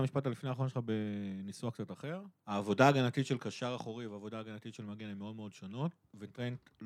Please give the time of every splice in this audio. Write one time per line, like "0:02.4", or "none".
0:02.3